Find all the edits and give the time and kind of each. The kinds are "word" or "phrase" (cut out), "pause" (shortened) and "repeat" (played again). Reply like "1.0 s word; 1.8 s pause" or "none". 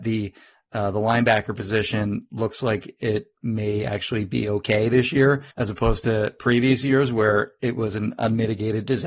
5.5 s pause